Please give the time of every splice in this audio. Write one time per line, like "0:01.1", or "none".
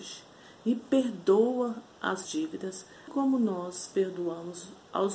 0:02.2
0:03.1